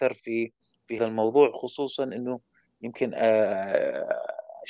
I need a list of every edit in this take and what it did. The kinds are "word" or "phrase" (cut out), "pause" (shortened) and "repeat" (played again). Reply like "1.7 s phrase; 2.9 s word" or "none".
1.0 s word

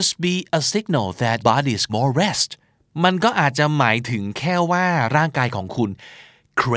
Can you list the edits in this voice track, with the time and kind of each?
1.4 s word; 1.9 s word

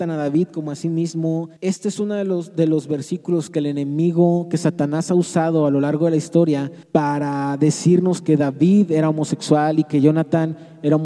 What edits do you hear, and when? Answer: 1.6 s pause; 6.8 s pause

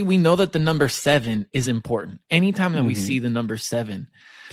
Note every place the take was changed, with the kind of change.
none

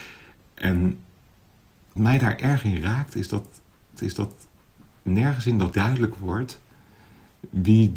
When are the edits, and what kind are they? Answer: 2.0 s word; 4.0 s repeat; 5.7 s word

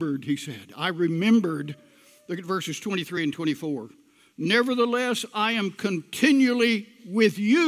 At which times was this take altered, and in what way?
none

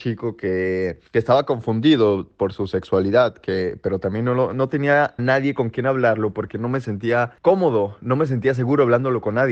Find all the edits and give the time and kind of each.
1.1 s pause; 4.5 s word; 5.2 s word

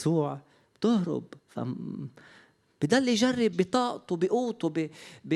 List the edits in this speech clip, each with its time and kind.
1.4 s pause; 3.5 s word

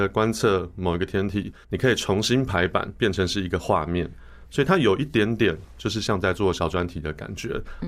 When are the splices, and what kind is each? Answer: 1.6 s pause; 5.7 s pause

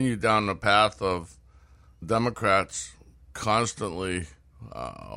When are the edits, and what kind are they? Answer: 2.0 s word

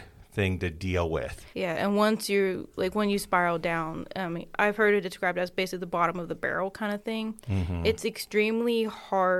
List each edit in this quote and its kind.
1.5 s pause; 2.7 s pause

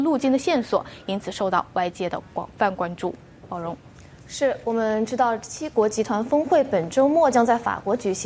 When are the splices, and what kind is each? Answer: none

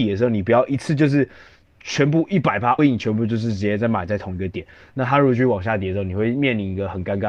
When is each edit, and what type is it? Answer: 2.8 s word

